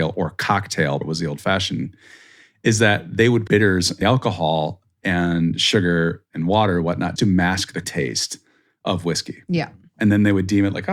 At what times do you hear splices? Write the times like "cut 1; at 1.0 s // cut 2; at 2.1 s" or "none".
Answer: cut 1; at 1.0 s // cut 2; at 3.5 s // cut 3; at 4.0 s // cut 4; at 7.2 s // cut 5; at 7.8 s